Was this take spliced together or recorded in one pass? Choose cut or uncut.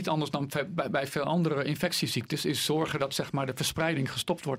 uncut